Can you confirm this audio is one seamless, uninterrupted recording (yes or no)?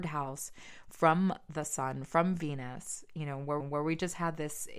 no